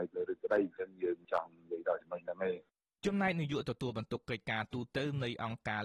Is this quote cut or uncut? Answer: uncut